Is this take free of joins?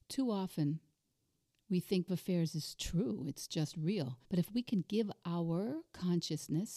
no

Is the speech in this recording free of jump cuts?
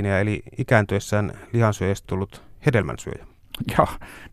no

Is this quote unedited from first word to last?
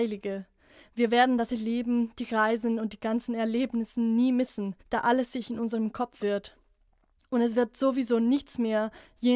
no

